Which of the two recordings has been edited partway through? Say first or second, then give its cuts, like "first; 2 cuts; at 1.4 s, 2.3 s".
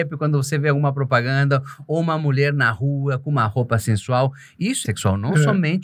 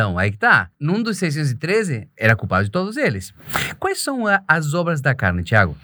first; 1 cut; at 4.8 s